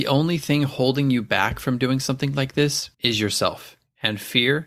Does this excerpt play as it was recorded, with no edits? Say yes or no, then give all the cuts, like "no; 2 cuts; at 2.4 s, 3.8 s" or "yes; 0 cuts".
no; 1 cut; at 2.9 s